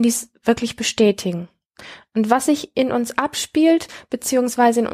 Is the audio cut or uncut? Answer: uncut